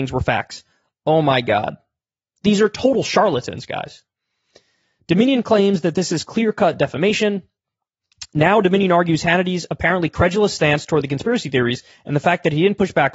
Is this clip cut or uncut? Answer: uncut